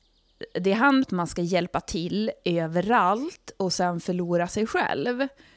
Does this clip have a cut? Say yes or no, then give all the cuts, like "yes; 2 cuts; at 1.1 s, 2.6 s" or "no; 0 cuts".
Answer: yes; 1 cut; at 1.0 s